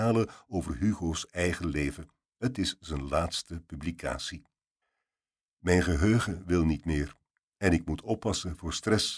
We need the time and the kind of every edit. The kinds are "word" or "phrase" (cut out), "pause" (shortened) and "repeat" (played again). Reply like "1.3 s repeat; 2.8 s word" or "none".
none